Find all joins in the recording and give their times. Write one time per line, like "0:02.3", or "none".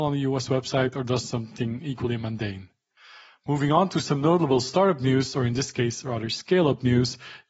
0:03.0